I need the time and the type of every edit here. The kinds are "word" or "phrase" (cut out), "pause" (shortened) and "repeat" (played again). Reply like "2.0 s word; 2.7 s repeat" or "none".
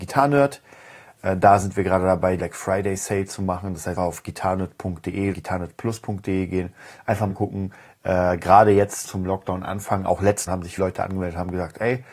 2.4 s word; 4.0 s word; 5.3 s word; 7.3 s word; 9.0 s word; 10.5 s word; 10.8 s word